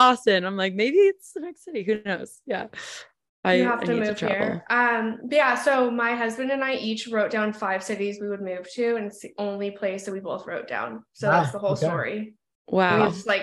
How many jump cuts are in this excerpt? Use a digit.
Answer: 0